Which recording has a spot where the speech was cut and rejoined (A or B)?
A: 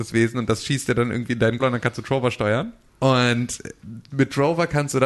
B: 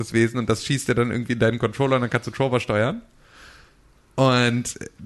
A